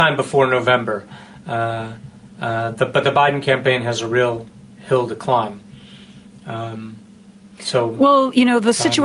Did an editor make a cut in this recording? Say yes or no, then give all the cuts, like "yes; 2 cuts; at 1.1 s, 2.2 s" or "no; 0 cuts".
no; 0 cuts